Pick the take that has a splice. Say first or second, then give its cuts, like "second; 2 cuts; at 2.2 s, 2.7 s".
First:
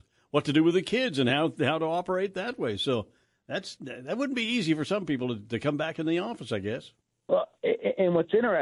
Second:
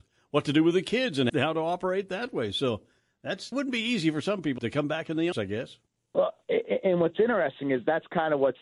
second; 4 cuts; at 1.3 s, 3.5 s, 4.6 s, 5.3 s